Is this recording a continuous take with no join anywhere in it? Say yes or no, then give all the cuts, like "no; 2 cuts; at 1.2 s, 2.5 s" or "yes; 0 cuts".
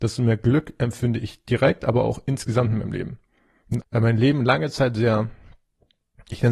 no; 1 cut; at 3.8 s